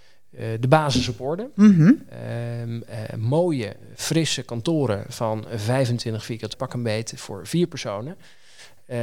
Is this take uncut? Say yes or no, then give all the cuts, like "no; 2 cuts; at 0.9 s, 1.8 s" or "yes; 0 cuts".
no; 1 cut; at 6.5 s